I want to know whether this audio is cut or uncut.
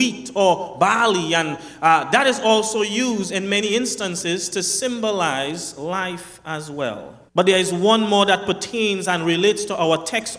cut